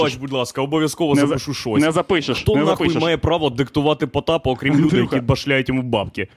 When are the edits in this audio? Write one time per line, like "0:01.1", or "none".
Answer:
none